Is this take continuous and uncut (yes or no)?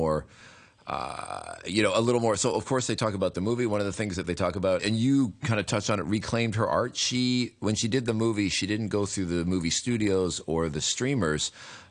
no